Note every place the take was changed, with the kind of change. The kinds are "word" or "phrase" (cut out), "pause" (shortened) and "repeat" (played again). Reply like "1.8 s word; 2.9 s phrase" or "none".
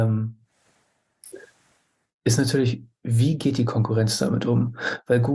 none